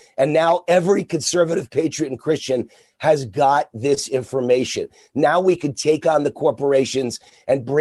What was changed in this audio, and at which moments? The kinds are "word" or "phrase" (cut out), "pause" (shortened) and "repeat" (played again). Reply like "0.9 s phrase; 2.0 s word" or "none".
none